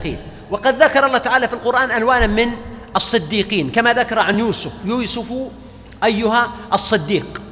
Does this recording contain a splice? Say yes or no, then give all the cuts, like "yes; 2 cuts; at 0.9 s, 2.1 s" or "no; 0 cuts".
no; 0 cuts